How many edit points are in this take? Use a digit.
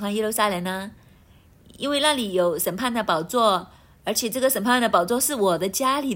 0